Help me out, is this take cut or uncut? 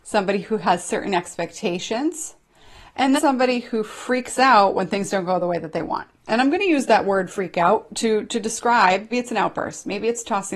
cut